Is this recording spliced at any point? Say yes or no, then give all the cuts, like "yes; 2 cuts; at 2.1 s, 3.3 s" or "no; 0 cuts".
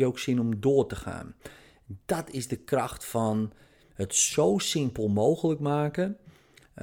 no; 0 cuts